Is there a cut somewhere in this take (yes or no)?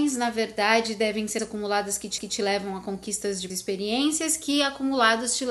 yes